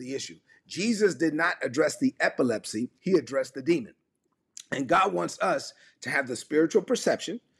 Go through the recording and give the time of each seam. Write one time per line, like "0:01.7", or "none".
0:02.9